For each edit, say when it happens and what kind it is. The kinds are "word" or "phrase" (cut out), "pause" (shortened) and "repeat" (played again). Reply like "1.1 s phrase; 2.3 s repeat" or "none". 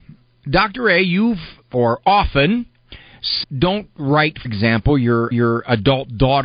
1.6 s word; 3.4 s word; 4.4 s word; 5.3 s repeat

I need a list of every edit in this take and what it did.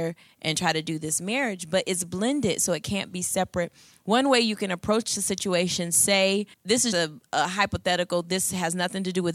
6.5 s pause; 6.9 s word

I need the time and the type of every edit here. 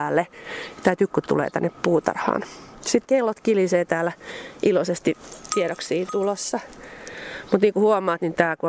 1.1 s word; 3.0 s word; 6.1 s phrase

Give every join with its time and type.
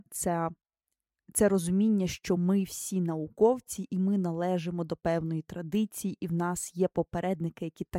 none

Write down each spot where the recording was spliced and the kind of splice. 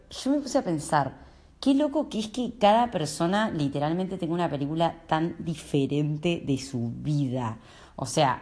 none

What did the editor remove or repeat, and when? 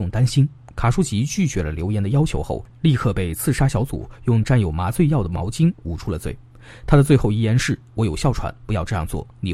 none

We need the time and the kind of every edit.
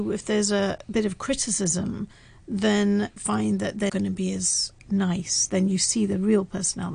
3.2 s word; 3.9 s word

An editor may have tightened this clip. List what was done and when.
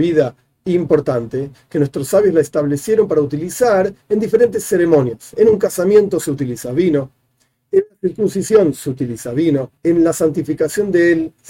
9.8 s pause

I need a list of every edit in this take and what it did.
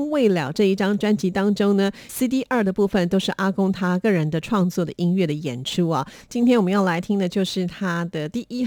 2.1 s phrase

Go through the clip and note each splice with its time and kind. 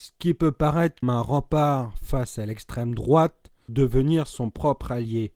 1.0 s word; 3.7 s word

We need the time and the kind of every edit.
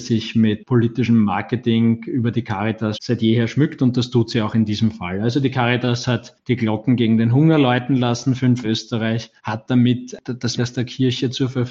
2.9 s word; 8.6 s phrase; 9.4 s pause; 10.6 s phrase

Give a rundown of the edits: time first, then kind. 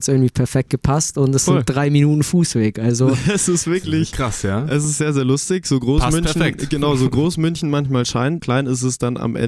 8.4 s word

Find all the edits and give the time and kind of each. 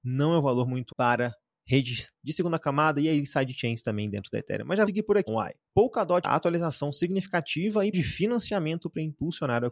0.9 s word; 4.9 s word; 5.3 s word; 6.2 s word; 7.9 s word

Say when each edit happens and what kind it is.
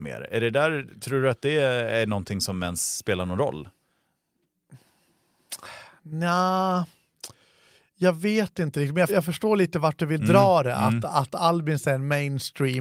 9.1 s word

